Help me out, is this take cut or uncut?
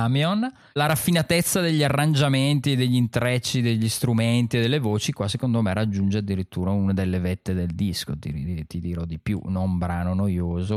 uncut